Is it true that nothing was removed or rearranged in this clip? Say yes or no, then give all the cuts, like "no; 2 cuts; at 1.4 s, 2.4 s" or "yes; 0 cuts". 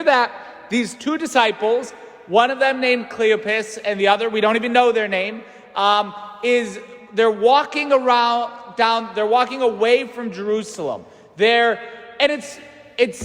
yes; 0 cuts